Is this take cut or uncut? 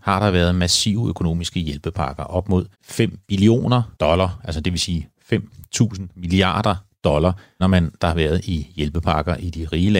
cut